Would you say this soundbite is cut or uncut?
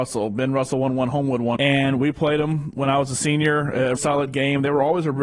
cut